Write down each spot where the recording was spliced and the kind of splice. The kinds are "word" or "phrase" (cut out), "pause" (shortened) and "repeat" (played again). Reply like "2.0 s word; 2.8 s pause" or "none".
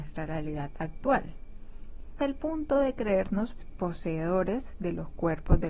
2.2 s word; 3.6 s word